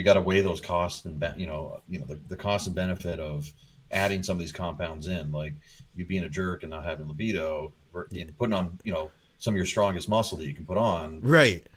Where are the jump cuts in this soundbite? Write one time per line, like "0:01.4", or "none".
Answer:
none